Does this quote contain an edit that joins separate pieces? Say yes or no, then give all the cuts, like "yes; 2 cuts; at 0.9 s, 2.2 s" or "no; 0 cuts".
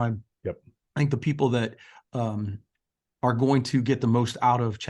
no; 0 cuts